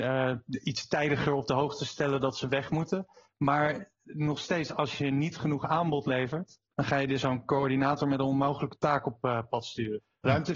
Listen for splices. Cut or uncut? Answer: uncut